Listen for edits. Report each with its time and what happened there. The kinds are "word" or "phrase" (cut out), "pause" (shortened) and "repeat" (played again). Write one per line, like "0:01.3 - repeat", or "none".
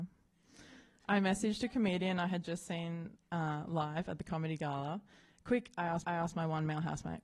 0:06.0 - repeat